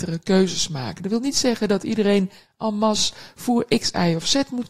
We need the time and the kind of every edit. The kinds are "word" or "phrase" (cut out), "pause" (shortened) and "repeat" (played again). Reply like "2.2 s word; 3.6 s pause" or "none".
none